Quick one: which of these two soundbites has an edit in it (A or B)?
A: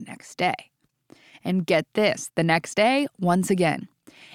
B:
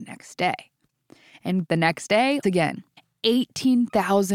B